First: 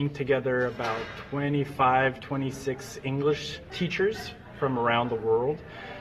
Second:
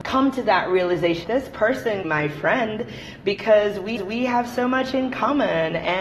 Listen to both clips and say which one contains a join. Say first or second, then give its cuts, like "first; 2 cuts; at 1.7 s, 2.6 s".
second; 3 cuts; at 1.2 s, 2.0 s, 4.0 s